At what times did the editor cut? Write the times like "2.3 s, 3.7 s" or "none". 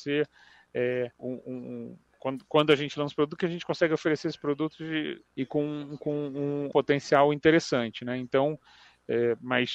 1.1 s, 5.3 s, 6.7 s

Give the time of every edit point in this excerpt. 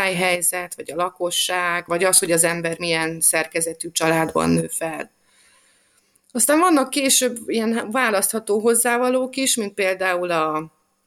1.9 s

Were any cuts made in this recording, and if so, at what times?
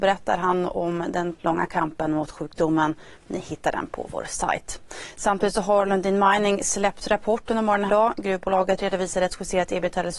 1.3 s, 7.9 s

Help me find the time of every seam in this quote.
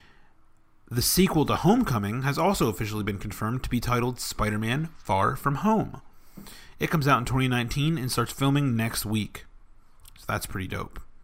none

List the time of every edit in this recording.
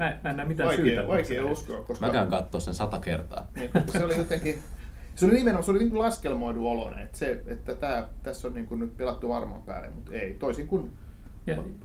none

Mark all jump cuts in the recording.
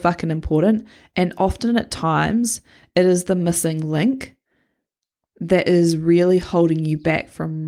none

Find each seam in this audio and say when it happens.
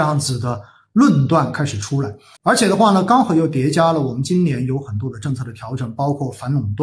2.4 s

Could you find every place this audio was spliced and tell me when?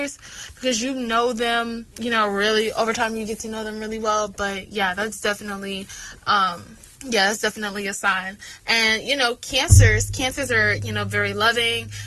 1.9 s, 6.9 s

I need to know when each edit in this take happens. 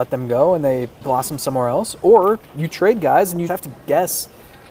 1.0 s, 2.5 s, 3.5 s

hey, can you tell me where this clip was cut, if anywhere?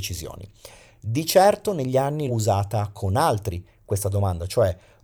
2.3 s

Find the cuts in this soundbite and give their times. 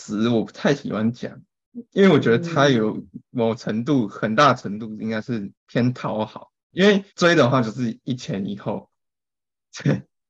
5.5 s, 6.6 s, 7.1 s

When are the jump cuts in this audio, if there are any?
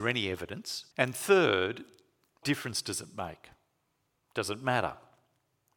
0.9 s, 2.4 s

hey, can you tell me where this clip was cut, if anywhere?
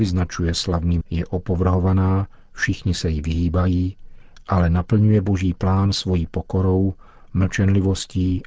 1.0 s

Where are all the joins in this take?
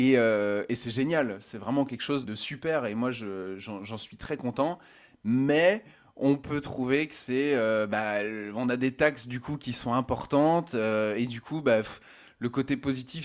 2.2 s

